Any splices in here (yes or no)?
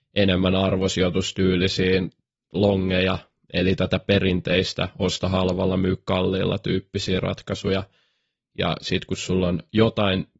no